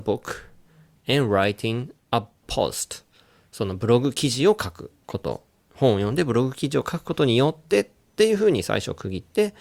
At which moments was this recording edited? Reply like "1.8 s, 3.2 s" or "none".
2.4 s